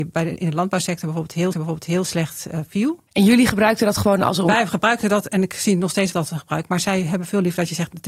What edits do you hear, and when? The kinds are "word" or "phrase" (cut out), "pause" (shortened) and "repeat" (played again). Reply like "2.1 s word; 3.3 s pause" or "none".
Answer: 1.5 s repeat; 6.1 s word